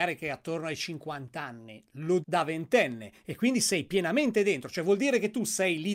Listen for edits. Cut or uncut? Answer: cut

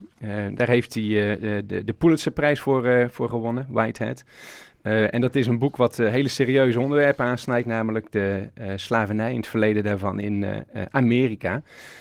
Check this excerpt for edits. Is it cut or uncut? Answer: uncut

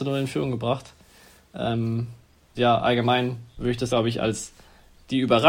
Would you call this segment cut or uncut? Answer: cut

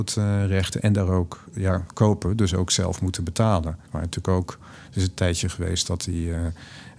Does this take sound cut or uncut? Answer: cut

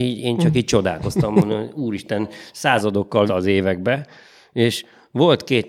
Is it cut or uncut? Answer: cut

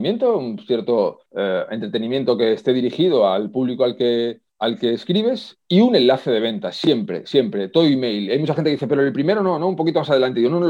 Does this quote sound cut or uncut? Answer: cut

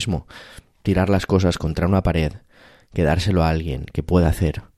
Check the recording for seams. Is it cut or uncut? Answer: uncut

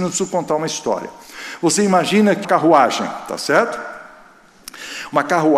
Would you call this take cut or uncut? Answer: cut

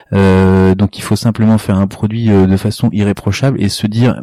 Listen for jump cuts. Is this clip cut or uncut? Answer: uncut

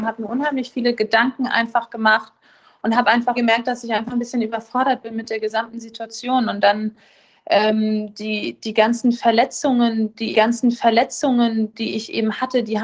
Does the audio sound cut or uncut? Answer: cut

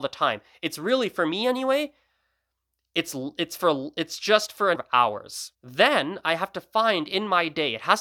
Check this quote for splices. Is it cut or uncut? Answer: cut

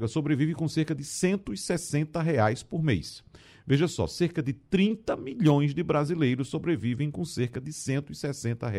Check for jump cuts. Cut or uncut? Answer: uncut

